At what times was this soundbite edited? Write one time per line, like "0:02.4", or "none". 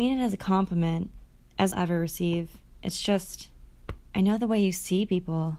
0:01.7